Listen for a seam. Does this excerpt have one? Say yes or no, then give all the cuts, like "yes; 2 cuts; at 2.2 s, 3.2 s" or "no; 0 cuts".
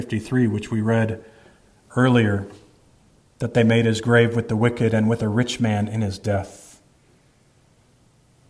no; 0 cuts